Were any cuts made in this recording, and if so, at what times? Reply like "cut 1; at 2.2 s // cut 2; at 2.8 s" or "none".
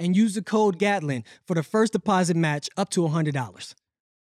none